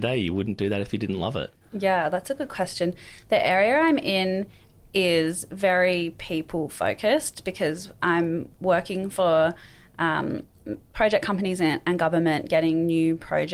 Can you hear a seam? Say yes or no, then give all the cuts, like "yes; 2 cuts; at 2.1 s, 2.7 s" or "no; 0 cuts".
no; 0 cuts